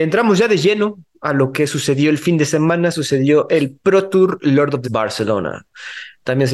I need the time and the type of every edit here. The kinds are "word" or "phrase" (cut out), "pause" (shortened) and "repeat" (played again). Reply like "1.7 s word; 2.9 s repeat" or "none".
4.8 s word